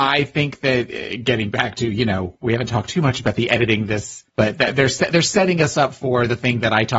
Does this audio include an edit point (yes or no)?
yes